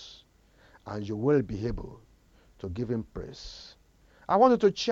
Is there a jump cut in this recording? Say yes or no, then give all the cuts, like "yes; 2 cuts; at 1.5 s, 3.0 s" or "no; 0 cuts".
no; 0 cuts